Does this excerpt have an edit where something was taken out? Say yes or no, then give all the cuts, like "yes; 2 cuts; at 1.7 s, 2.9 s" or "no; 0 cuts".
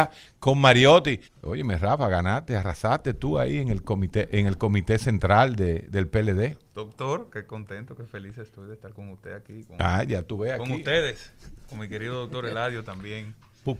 yes; 1 cut; at 1.2 s